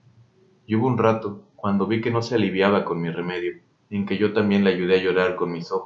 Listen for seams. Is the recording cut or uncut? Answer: cut